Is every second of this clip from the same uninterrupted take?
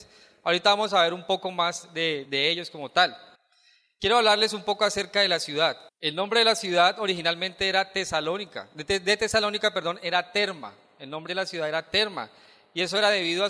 no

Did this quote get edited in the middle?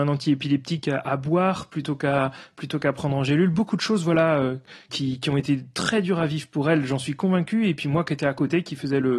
yes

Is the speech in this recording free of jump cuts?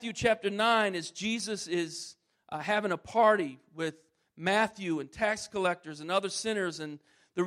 yes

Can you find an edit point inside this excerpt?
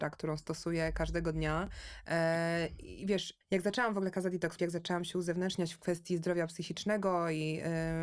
yes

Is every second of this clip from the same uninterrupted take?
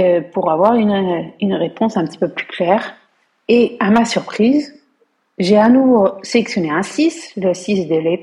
yes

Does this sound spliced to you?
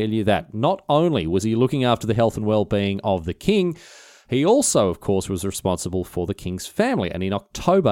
no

